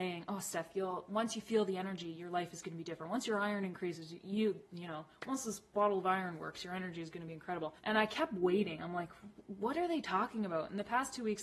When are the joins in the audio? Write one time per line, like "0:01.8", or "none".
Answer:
0:07.8